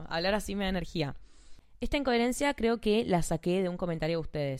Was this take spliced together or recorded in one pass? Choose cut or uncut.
cut